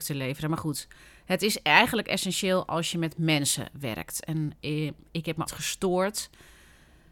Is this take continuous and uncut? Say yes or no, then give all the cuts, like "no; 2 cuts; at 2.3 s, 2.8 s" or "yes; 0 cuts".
no; 1 cut; at 5.5 s